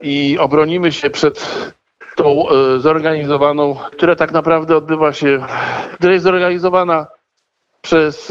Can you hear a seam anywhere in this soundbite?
yes; 2 cuts; at 2.2 s, 3.9 s

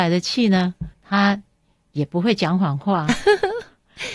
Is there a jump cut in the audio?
yes; 1 cut; at 0.9 s

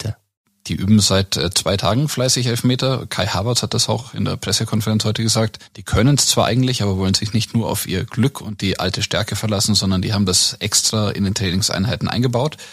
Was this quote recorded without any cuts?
no; 1 cut; at 5.7 s

